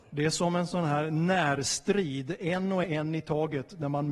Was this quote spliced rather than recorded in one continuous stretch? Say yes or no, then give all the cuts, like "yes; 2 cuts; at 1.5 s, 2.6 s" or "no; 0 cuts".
yes; 1 cut; at 2.8 s